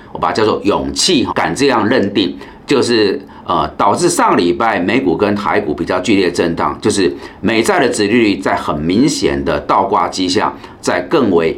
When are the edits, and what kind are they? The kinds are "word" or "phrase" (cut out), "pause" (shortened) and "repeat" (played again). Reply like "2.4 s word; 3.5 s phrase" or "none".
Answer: 1.3 s word